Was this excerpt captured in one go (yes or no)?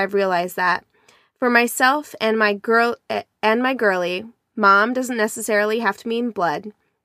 yes